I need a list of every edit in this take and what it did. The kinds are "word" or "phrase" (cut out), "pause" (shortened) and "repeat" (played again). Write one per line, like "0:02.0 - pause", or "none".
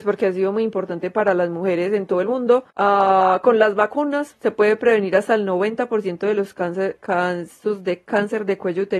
0:02.7 - pause

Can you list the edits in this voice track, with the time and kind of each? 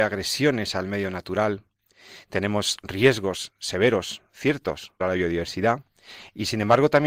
0:05.0 - phrase

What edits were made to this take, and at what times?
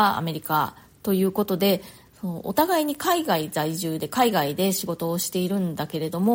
none

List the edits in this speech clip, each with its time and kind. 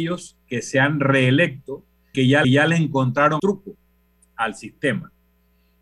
0:02.1 - word
0:02.4 - repeat
0:03.4 - word

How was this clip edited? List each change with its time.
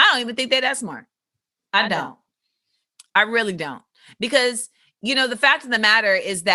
none

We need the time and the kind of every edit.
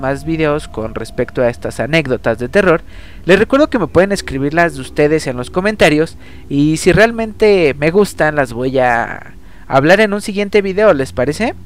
none

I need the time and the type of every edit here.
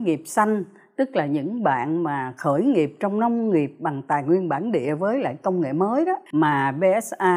0:06.3 - pause

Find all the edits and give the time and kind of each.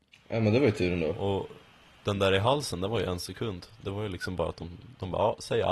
none

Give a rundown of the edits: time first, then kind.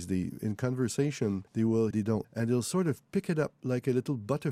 0:01.5 - pause
0:01.9 - phrase
0:02.2 - word

